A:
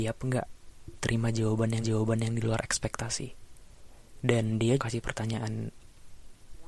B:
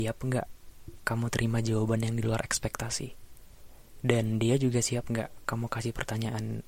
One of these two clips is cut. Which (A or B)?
A